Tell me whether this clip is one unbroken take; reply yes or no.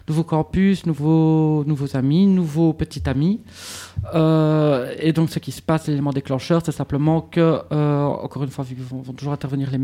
yes